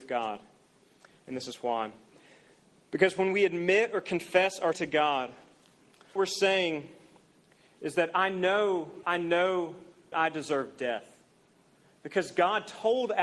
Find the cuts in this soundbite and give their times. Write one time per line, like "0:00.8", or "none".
0:04.7
0:06.2
0:09.0
0:10.1